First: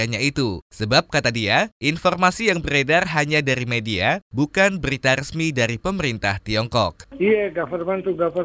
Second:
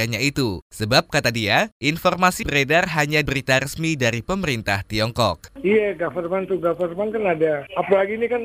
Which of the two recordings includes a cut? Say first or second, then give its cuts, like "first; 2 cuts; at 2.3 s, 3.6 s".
second; 2 cuts; at 2.4 s, 3.3 s